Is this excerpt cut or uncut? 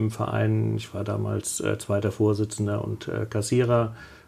uncut